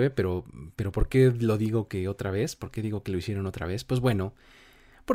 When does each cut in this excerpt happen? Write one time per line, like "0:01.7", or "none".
none